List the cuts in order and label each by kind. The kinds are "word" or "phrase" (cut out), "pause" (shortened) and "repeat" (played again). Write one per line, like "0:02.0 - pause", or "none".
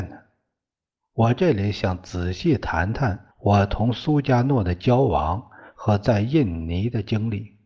0:03.3 - pause